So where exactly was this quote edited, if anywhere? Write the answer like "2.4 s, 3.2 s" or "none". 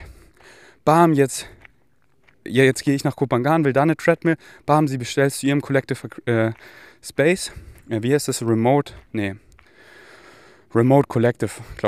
none

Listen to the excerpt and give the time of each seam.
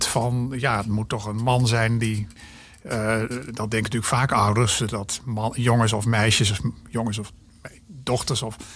none

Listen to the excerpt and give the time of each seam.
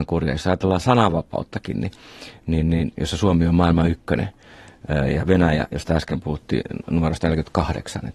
none

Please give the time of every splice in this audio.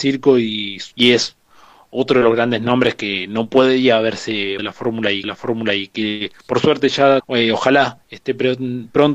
0.9 s, 4.6 s, 5.2 s, 7.2 s

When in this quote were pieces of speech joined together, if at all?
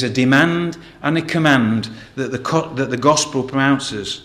none

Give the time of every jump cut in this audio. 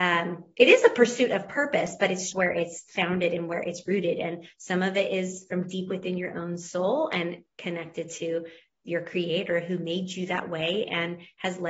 2.3 s

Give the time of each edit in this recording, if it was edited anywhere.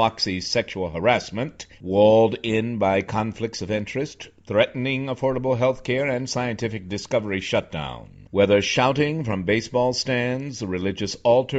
1.7 s, 8.3 s

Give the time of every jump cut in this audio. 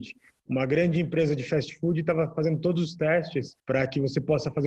3.6 s

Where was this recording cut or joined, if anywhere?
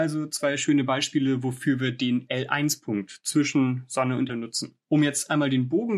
4.3 s, 4.8 s

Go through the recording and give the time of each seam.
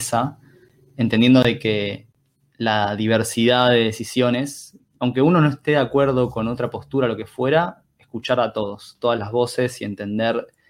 4.8 s

